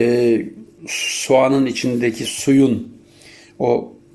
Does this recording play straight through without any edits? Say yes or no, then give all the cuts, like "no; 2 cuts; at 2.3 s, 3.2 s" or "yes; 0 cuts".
yes; 0 cuts